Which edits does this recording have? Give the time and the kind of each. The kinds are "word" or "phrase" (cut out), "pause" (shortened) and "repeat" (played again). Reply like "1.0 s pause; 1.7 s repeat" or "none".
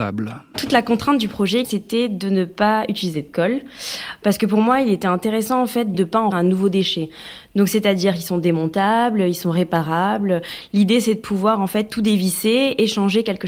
6.3 s word